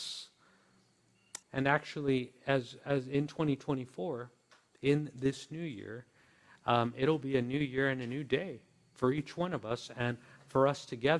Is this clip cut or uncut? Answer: cut